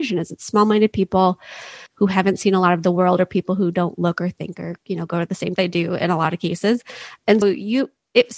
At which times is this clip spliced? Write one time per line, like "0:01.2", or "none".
0:01.9
0:04.8
0:05.6
0:07.4